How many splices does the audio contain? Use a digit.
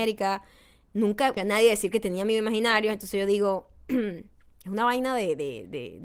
1